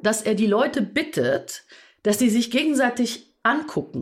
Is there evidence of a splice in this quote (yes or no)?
no